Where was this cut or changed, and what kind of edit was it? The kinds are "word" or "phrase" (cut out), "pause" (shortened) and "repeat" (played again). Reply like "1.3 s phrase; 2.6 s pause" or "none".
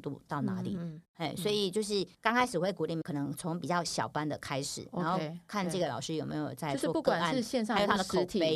2.1 s pause